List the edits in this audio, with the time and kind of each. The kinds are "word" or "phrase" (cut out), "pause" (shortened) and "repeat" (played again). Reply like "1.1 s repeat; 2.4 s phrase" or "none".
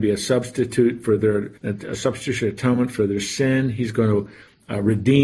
1.6 s pause